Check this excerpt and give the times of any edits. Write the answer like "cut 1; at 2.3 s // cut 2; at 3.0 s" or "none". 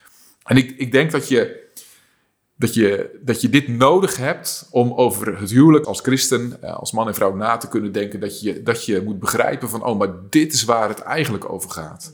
cut 1; at 5.8 s